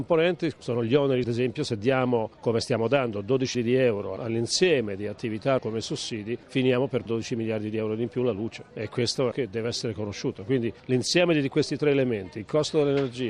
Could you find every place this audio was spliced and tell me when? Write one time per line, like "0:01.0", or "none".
0:01.2
0:03.5
0:05.6
0:07.1
0:09.3